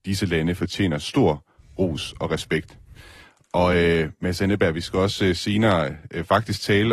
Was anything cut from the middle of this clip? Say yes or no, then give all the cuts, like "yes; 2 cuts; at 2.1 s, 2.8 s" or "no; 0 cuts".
no; 0 cuts